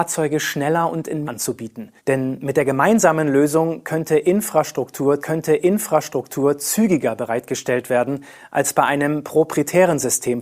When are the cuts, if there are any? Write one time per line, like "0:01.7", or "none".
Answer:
0:01.2
0:02.0
0:05.2